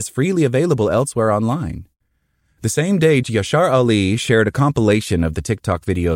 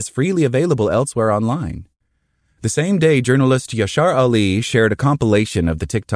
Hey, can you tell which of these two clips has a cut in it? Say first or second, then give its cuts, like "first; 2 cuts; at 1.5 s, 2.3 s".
first; 1 cut; at 3.2 s